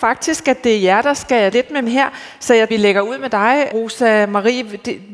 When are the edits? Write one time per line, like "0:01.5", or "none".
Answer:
0:01.5
0:01.8
0:02.7
0:03.7